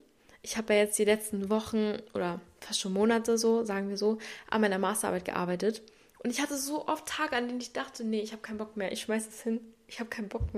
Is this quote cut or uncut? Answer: uncut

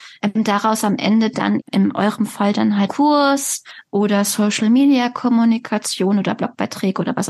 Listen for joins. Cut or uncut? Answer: cut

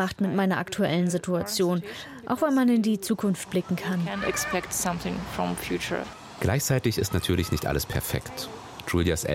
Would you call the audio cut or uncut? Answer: uncut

